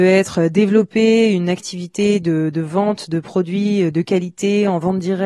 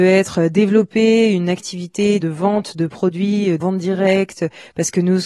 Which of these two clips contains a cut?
second; 2 cuts; at 2.2 s, 3.6 s

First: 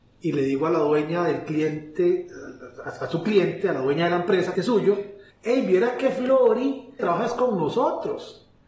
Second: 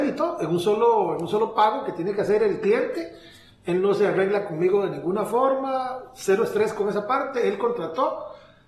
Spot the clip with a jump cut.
first; 3 cuts; at 4.5 s, 5.3 s, 7.0 s

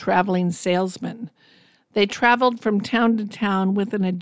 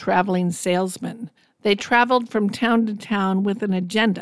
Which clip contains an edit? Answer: second; 1 cut; at 1.4 s

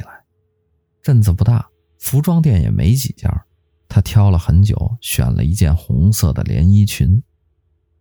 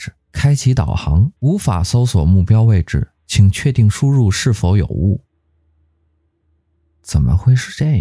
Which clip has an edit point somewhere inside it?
second; 1 cut; at 1.4 s

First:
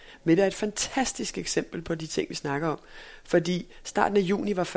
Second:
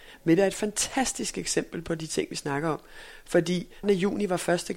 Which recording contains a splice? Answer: second; 1 cut; at 3.8 s

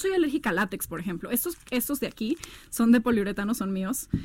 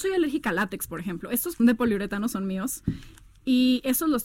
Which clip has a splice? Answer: second; 1 cut; at 1.6 s

